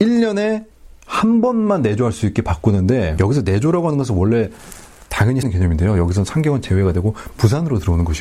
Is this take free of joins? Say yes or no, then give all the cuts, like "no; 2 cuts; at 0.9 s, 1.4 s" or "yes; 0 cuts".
no; 1 cut; at 5.4 s